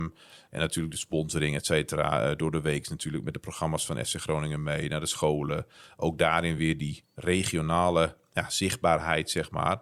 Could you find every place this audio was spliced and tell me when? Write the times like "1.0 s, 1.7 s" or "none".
none